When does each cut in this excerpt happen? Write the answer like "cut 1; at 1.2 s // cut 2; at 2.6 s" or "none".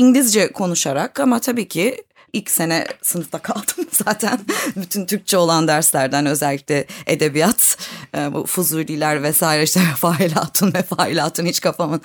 none